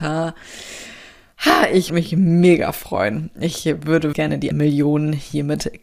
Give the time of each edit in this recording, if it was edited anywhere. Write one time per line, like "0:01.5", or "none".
0:01.9
0:04.1
0:04.5